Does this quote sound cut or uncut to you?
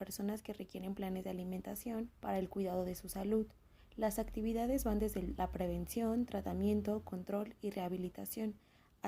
cut